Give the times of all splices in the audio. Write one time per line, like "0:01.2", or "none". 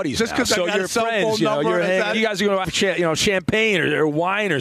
0:02.1
0:02.6